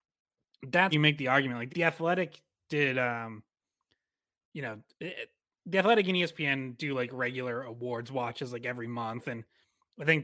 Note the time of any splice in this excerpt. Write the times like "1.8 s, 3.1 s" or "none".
0.9 s, 1.7 s